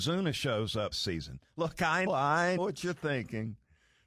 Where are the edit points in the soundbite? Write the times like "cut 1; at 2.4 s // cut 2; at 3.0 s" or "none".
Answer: cut 1; at 0.9 s // cut 2; at 2.1 s // cut 3; at 2.6 s